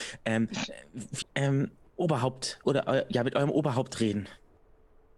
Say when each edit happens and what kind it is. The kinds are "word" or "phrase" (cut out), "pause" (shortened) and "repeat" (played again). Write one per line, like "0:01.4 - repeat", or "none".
0:01.2 - word
0:01.9 - phrase
0:02.6 - word